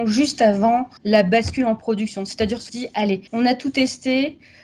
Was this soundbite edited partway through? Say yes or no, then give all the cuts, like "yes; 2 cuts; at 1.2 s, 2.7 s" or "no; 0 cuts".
yes; 3 cuts; at 1.0 s, 2.7 s, 3.3 s